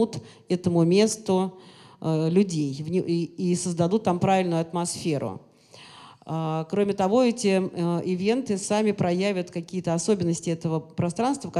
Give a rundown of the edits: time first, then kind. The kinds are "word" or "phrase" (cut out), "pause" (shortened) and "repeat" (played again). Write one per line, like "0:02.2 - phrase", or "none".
none